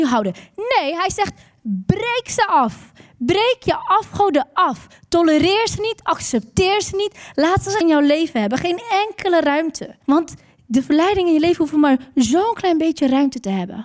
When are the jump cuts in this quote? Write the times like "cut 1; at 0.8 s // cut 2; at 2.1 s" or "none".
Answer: cut 1; at 7.8 s // cut 2; at 10.0 s